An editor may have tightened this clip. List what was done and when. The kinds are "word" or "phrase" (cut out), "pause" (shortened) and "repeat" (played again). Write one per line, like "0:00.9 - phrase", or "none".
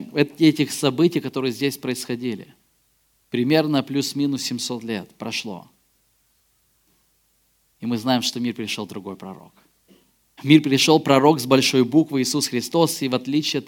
none